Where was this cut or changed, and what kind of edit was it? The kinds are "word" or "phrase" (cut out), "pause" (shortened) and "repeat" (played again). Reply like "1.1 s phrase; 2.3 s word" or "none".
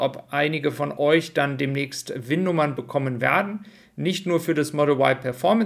none